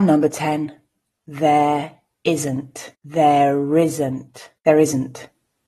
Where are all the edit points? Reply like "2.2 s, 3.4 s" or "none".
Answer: 2.9 s, 4.6 s